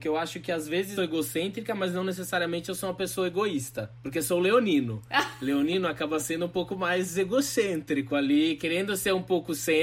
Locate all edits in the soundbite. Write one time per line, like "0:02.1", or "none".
0:01.0